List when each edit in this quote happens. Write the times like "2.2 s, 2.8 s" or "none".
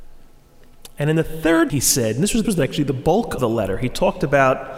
1.7 s, 2.4 s, 3.4 s